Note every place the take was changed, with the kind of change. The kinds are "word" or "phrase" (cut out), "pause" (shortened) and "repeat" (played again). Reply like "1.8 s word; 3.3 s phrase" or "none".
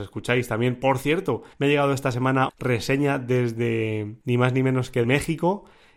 1.5 s pause; 2.5 s word; 4.2 s pause; 5.0 s word